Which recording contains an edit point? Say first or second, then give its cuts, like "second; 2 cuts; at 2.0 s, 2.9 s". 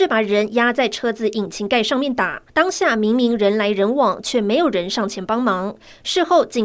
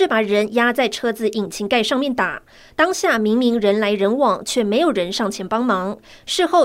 first; 1 cut; at 2.5 s